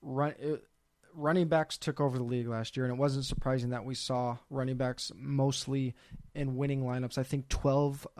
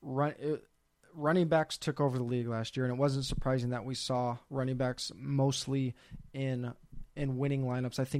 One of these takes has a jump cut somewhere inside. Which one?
first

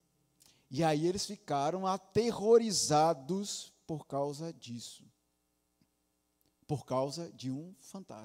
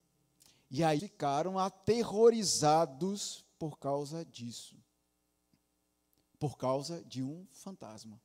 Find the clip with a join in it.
second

